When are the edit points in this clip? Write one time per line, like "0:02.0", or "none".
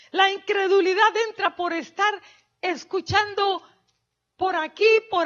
none